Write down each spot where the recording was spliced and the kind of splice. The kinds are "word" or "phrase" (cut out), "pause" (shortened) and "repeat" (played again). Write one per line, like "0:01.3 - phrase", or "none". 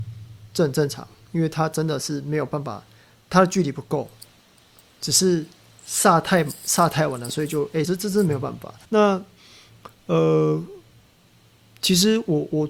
0:07.8 - phrase
0:08.8 - pause

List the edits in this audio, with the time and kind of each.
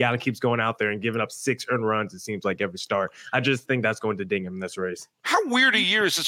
0:05.1 - pause

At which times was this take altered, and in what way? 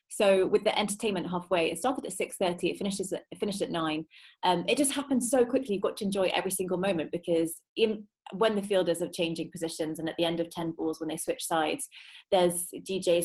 0:07.7 - pause

